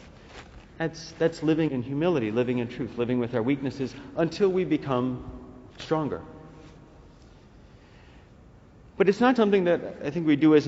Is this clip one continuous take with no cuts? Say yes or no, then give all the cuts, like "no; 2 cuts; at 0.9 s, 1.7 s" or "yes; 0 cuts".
no; 3 cuts; at 1.7 s, 5.7 s, 9.4 s